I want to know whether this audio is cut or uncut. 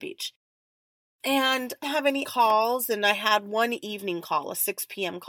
cut